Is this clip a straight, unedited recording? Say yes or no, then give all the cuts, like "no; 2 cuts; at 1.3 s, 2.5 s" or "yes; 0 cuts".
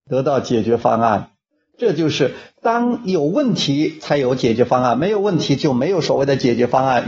yes; 0 cuts